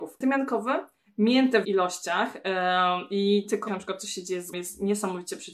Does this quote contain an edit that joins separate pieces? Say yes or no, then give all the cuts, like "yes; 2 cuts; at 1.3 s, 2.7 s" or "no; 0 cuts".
yes; 3 cuts; at 1.6 s, 3.7 s, 4.5 s